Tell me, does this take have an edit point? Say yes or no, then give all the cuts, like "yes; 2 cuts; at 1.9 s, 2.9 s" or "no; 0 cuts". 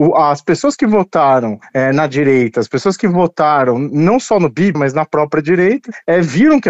yes; 1 cut; at 4.7 s